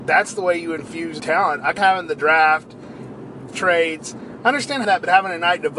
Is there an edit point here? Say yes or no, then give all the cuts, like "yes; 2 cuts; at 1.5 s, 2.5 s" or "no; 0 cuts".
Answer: yes; 4 cuts; at 1.2 s, 1.8 s, 3.4 s, 4.8 s